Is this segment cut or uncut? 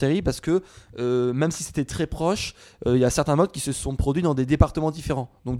uncut